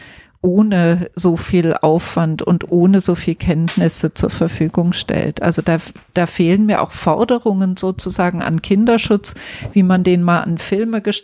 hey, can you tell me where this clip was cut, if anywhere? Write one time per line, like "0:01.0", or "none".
none